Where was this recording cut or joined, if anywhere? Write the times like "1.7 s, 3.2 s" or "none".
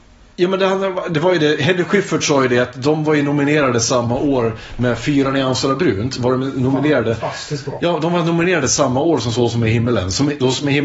none